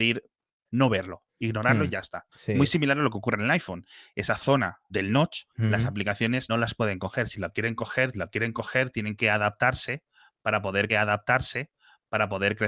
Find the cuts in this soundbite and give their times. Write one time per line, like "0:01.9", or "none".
0:02.3
0:04.9
0:05.5
0:06.5
0:08.1
0:10.9